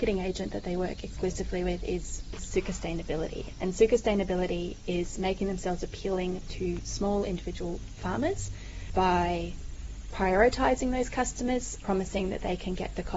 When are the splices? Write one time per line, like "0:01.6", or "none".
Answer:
none